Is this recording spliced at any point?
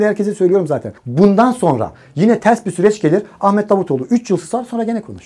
yes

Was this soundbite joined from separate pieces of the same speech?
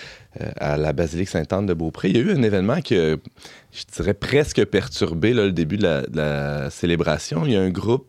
no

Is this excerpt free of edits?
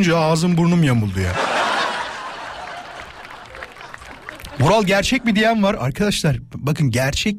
yes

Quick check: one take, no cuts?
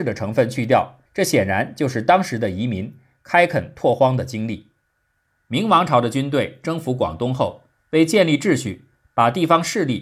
no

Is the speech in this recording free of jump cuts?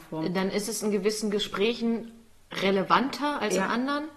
yes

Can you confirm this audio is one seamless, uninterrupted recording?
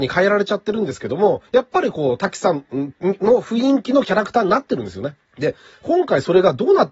no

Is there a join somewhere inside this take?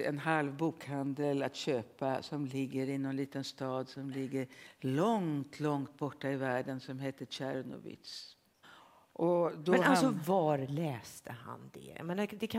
no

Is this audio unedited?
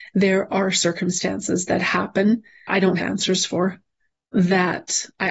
no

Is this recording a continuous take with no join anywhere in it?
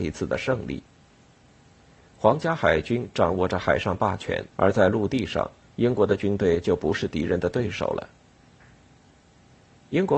no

